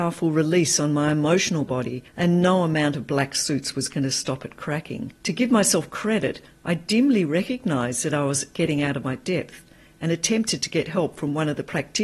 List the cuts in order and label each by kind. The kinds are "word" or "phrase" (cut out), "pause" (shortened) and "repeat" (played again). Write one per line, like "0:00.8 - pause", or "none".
0:02.1 - pause
0:05.2 - pause